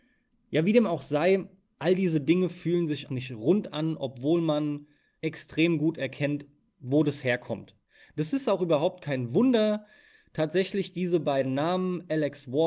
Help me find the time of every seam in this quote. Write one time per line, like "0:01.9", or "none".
0:03.1